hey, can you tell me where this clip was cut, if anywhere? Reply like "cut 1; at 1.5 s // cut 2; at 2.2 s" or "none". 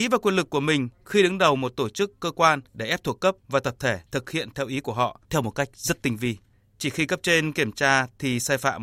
cut 1; at 2.7 s // cut 2; at 3.4 s // cut 3; at 4.0 s // cut 4; at 5.2 s // cut 5; at 6.5 s